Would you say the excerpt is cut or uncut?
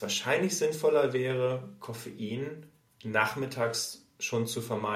uncut